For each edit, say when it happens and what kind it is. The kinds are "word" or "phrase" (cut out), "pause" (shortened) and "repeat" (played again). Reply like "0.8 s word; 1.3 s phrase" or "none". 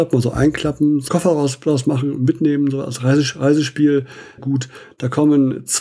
1.1 s word; 4.4 s word